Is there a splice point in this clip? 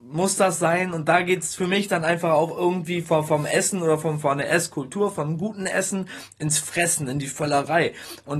no; 0 cuts

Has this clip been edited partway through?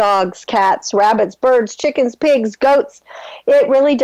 no; 0 cuts

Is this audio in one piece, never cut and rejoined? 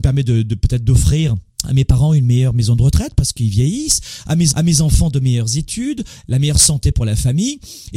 no; 2 cuts; at 1.5 s, 4.5 s

